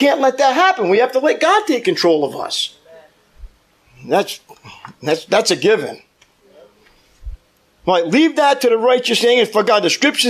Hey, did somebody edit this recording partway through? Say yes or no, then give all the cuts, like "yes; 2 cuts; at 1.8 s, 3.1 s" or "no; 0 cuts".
no; 0 cuts